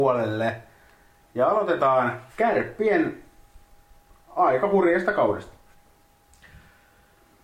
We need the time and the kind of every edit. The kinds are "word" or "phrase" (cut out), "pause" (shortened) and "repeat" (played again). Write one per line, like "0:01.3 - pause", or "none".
0:02.3 - pause